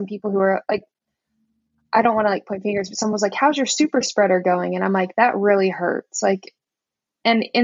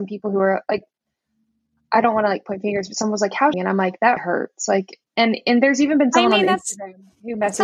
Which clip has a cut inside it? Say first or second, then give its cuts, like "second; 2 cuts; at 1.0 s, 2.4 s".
second; 3 cuts; at 3.5 s, 4.2 s, 5.1 s